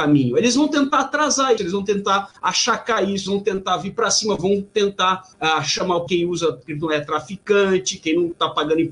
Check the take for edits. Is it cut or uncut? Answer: cut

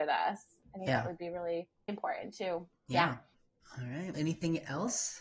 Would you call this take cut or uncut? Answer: cut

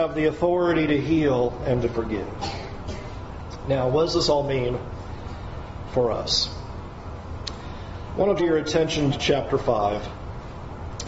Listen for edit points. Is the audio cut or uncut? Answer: cut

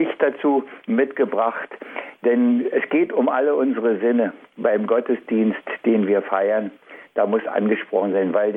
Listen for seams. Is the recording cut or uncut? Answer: cut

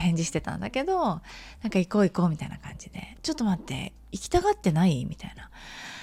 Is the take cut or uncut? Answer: cut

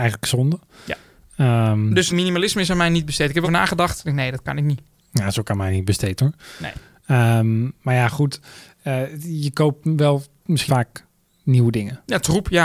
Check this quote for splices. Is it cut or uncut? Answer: cut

